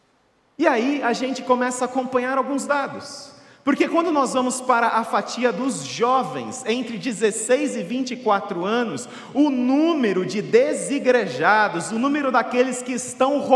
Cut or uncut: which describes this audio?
uncut